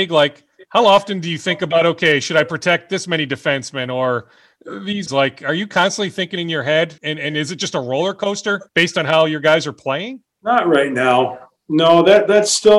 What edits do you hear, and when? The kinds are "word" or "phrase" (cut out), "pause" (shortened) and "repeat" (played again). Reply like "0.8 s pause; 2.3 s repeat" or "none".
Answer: 5.1 s phrase; 7.0 s pause; 8.7 s pause; 10.3 s pause